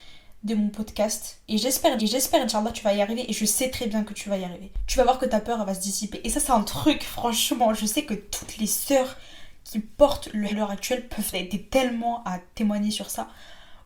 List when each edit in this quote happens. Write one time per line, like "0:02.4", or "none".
0:02.0
0:03.7
0:10.5
0:11.3